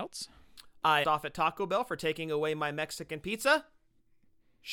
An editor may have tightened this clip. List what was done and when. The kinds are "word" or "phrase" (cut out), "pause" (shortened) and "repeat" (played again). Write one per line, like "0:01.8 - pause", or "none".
0:01.0 - phrase